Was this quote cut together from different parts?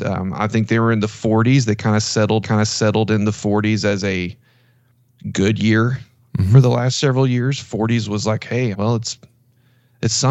yes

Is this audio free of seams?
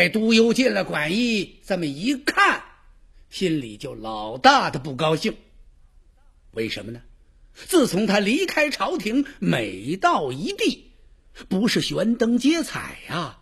yes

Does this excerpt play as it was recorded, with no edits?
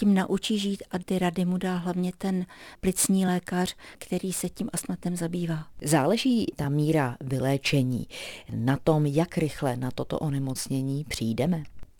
yes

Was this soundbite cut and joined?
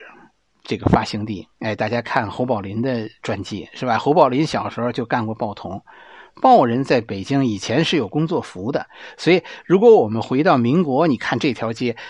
yes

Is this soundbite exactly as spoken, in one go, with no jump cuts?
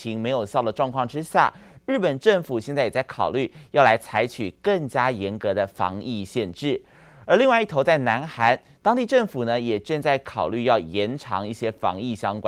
yes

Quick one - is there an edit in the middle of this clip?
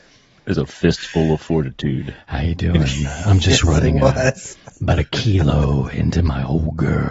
no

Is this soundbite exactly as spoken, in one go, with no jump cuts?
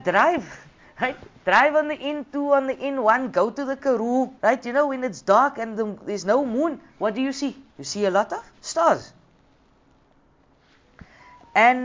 no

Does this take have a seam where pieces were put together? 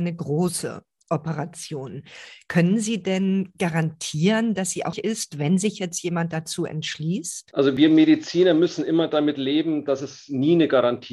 yes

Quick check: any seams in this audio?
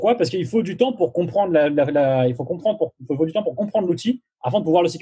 no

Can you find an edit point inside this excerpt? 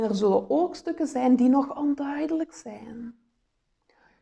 no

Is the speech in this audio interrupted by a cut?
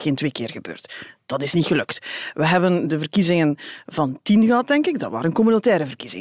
no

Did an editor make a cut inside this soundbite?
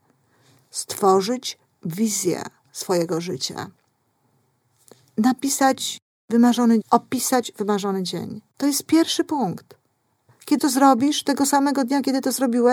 yes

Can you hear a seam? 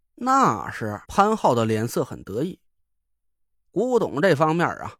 yes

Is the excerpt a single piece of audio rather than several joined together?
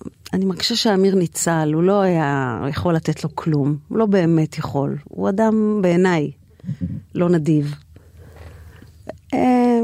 yes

